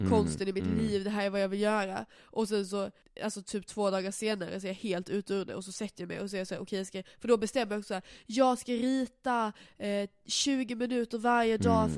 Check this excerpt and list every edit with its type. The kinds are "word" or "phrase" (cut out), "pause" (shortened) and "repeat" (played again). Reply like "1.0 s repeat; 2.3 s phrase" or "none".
none